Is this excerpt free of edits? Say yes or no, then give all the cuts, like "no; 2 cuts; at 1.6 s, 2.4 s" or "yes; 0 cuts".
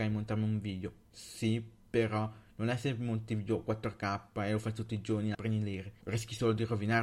no; 1 cut; at 5.3 s